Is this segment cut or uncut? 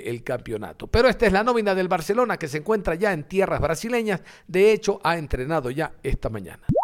uncut